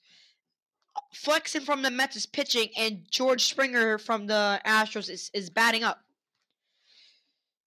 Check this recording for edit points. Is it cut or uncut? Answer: uncut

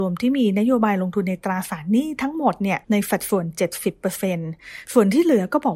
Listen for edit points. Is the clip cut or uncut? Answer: cut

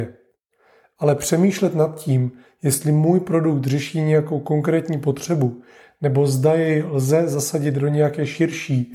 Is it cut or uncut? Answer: uncut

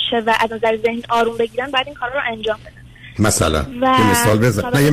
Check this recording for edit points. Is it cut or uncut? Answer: uncut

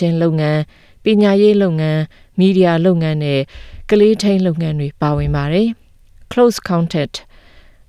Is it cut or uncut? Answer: cut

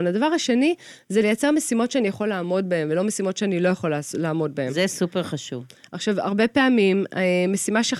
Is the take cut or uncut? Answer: uncut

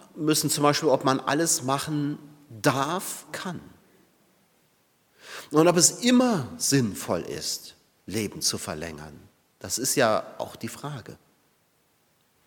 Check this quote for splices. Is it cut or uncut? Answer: cut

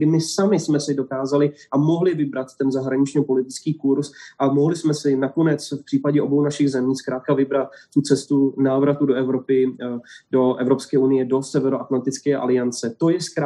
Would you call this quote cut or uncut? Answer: uncut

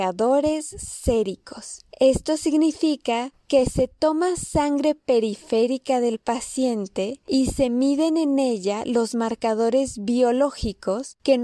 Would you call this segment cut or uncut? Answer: uncut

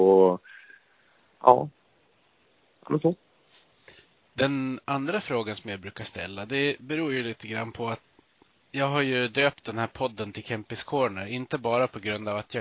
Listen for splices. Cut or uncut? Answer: uncut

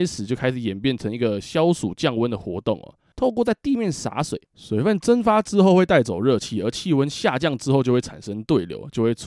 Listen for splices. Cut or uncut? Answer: cut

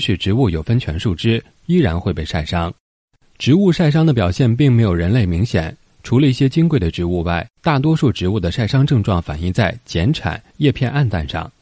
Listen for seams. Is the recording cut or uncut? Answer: cut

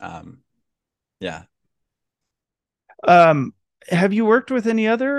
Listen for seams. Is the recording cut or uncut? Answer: uncut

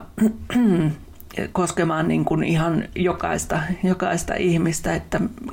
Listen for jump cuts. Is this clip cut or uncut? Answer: uncut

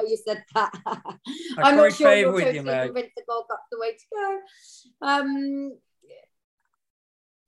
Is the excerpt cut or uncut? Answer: uncut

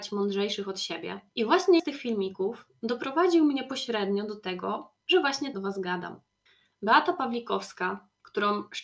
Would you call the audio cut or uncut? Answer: cut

